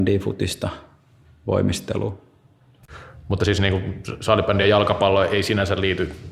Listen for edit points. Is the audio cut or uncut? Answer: uncut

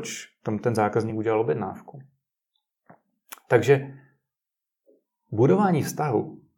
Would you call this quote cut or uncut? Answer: uncut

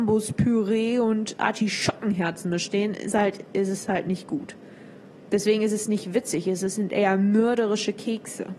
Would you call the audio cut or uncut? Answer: cut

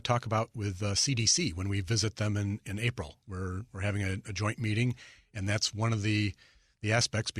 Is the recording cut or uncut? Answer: uncut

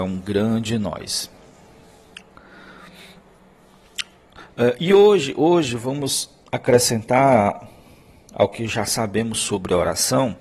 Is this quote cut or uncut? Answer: cut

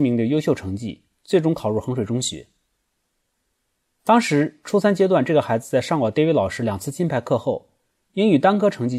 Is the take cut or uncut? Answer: uncut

